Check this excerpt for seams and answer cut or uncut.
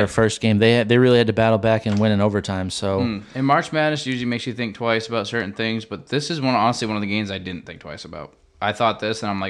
uncut